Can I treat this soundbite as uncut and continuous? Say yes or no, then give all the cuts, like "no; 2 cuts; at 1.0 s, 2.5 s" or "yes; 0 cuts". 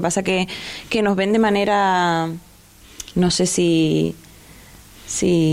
yes; 0 cuts